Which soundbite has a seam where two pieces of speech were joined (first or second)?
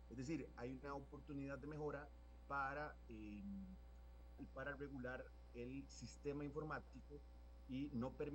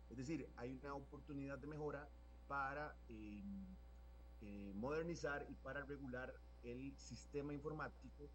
first